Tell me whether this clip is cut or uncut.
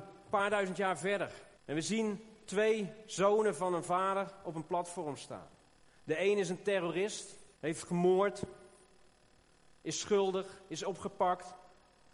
cut